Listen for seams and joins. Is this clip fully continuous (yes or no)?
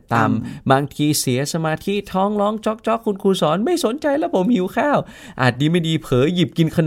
yes